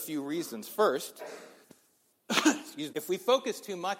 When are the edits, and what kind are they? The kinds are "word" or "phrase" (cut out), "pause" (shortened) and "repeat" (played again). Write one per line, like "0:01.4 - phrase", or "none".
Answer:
0:01.6 - pause
0:02.9 - word